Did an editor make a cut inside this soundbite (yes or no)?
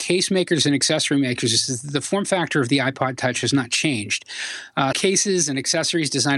yes